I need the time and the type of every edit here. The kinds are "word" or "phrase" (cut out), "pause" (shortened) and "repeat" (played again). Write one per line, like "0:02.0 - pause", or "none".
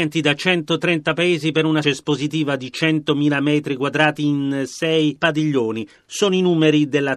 0:01.8 - word

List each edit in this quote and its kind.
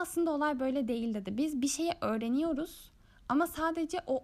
none

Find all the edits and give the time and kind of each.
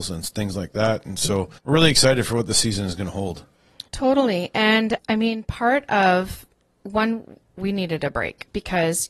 0:01.6 - pause
0:03.9 - pause
0:06.6 - pause

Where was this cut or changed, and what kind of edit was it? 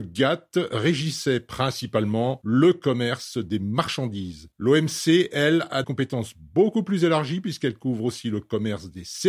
0:05.8 - word

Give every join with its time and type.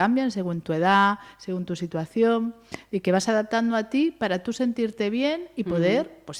none

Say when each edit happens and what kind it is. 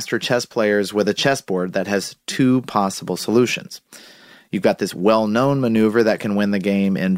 none

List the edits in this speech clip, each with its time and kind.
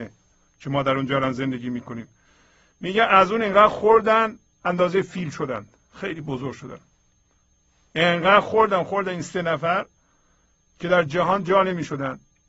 none

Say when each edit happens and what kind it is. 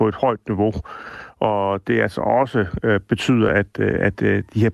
none

